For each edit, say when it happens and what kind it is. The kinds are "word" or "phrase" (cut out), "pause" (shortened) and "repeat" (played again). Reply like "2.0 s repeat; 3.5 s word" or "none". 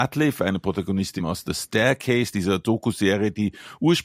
1.2 s word